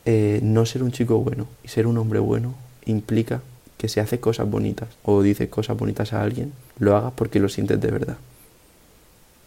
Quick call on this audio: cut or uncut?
cut